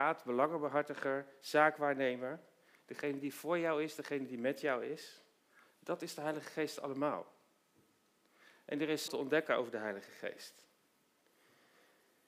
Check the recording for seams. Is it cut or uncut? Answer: cut